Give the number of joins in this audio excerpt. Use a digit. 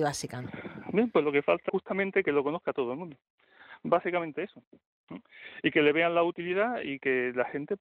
1